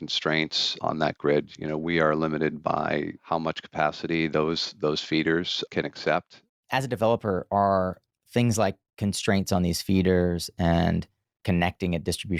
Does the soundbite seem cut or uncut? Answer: uncut